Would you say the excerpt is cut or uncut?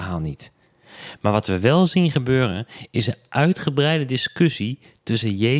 uncut